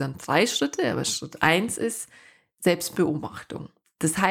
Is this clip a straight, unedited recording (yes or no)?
yes